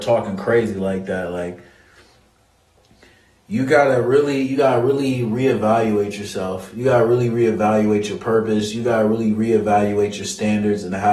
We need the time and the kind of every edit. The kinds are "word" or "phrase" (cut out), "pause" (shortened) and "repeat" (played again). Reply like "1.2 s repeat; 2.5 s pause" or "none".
none